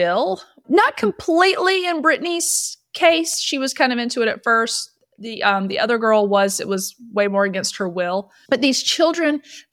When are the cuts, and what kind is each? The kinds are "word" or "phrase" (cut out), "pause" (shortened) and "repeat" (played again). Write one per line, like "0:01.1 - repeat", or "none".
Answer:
none